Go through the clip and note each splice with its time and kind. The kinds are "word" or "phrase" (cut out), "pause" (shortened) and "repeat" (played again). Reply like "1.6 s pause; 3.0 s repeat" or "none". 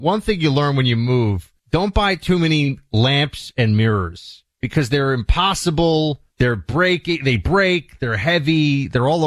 1.6 s pause; 4.5 s pause; 6.3 s pause